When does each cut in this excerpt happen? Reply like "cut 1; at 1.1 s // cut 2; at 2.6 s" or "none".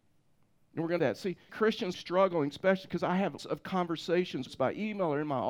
cut 1; at 1.0 s // cut 2; at 1.5 s // cut 3; at 1.9 s // cut 4; at 3.4 s // cut 5; at 4.5 s